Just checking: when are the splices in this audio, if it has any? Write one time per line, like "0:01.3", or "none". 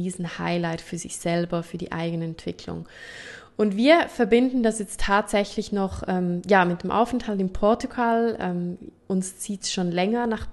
none

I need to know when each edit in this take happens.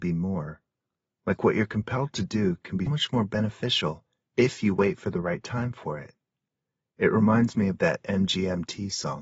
0:02.9

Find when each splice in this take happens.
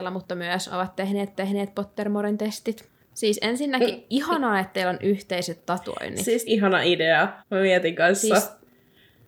0:01.3
0:06.5
0:07.4

